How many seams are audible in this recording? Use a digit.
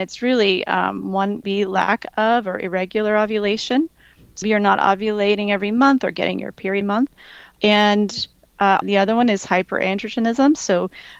4